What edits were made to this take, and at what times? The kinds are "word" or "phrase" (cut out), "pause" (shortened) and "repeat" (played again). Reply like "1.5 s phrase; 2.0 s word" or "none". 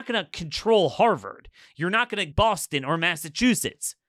2.3 s word